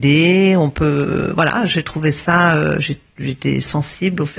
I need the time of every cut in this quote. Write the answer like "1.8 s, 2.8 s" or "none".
none